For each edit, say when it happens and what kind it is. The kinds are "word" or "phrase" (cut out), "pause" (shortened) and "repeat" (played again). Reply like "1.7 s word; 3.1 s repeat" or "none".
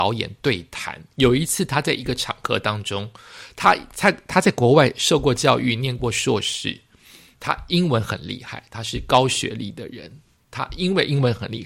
1.1 s pause